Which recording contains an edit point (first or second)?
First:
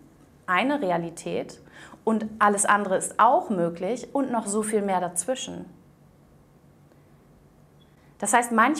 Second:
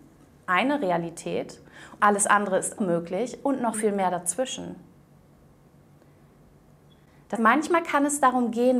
second